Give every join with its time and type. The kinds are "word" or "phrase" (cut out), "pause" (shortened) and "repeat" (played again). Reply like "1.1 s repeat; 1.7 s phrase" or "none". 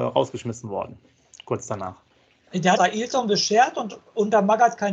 2.7 s phrase